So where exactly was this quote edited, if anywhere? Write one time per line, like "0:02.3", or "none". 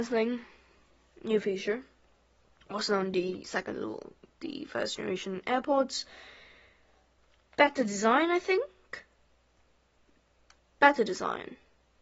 none